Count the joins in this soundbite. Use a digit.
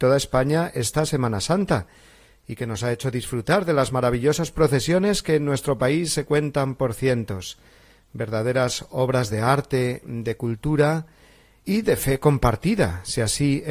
0